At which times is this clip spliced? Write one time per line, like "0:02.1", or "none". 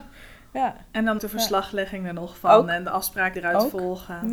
0:01.2
0:03.3

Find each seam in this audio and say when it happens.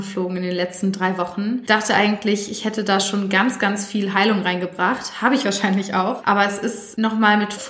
none

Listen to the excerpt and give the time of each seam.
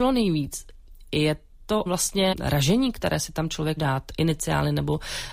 0:01.9
0:02.3
0:03.8

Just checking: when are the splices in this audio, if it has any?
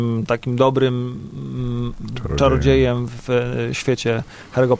none

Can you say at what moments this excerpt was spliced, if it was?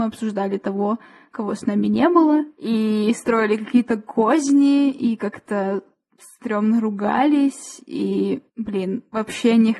0:08.5

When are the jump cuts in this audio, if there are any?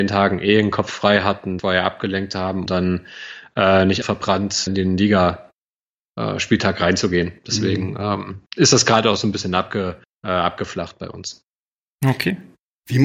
0:01.6
0:02.7
0:04.0
0:04.7
0:08.5
0:10.0

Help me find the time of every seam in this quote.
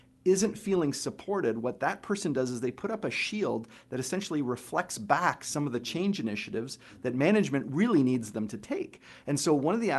none

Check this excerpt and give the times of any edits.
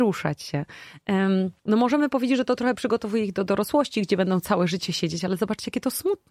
0:01.6

